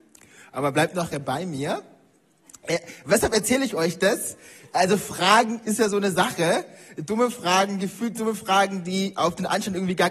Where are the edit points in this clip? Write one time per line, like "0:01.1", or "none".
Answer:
none